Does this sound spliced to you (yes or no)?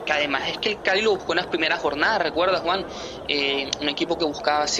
no